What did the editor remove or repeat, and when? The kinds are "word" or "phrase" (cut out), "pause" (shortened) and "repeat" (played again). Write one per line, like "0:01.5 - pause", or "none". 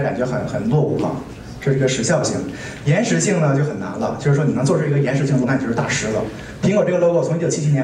0:05.4 - word